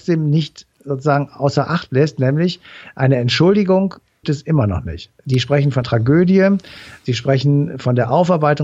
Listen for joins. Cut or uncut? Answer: cut